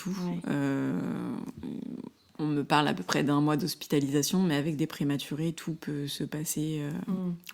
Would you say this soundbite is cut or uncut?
uncut